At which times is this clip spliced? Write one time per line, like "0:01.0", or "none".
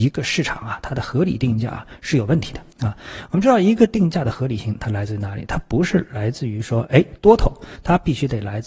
0:02.7